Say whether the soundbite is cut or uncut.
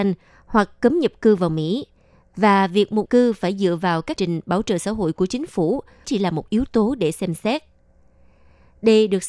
cut